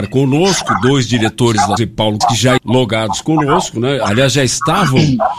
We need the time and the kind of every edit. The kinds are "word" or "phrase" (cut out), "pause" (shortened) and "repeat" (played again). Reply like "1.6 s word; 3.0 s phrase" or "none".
1.8 s phrase; 2.2 s word; 2.6 s word